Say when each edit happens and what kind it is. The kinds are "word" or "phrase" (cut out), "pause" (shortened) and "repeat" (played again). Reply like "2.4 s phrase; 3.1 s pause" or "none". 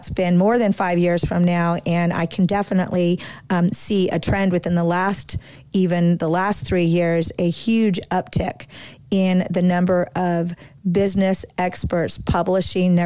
none